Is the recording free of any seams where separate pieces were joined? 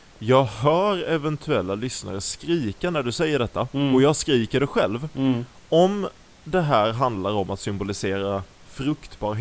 yes; 0 cuts

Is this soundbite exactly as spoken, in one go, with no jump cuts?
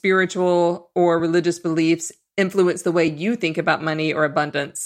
yes; 0 cuts

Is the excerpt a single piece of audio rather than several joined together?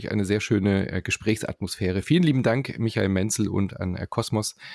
yes; 0 cuts

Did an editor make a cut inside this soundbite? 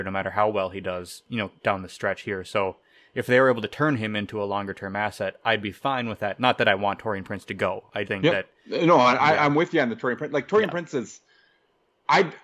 yes; 2 cuts; at 1.6 s, 8.0 s

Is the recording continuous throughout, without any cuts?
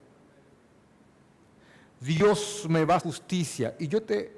no; 1 cut; at 3.0 s

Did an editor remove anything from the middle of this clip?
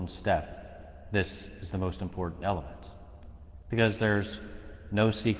no; 0 cuts

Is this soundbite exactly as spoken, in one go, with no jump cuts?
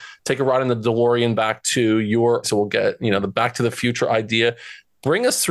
no; 1 cut; at 2.4 s

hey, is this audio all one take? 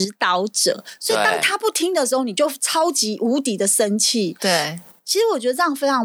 yes; 0 cuts

